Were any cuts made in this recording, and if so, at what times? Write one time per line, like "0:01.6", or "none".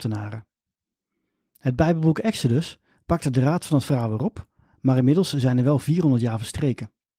none